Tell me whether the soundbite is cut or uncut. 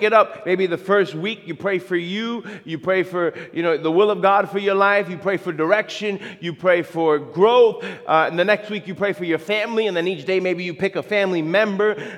uncut